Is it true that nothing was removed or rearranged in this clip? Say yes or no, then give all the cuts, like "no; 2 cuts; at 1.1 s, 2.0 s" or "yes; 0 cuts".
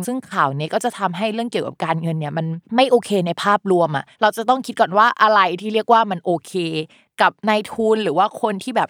no; 1 cut; at 4.1 s